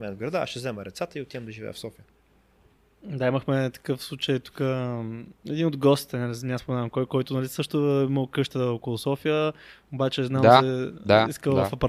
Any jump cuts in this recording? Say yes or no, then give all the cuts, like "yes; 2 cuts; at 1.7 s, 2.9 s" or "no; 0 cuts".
no; 0 cuts